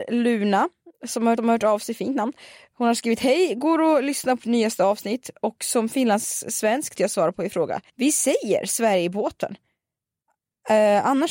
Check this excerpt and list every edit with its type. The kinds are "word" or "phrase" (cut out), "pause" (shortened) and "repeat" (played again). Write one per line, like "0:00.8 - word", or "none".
0:01.4 - repeat
0:04.4 - word
0:07.0 - word
0:07.9 - pause